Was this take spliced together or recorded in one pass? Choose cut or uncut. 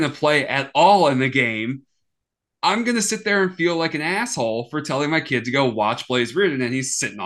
uncut